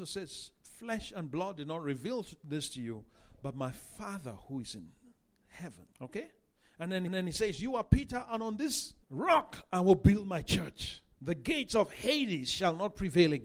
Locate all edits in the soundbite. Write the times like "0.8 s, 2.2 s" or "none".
5.9 s, 7.1 s, 9.0 s, 11.1 s